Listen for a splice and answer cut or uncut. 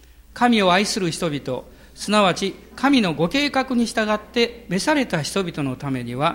uncut